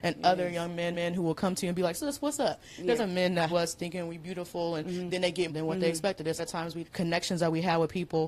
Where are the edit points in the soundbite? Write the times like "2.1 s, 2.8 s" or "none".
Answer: 0.9 s, 1.9 s, 3.0 s, 3.5 s, 5.5 s, 6.4 s, 6.8 s